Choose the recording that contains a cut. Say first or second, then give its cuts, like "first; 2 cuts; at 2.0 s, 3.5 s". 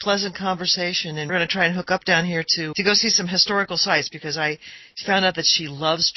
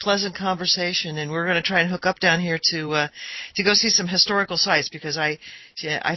first; 3 cuts; at 1.3 s, 2.7 s, 5.0 s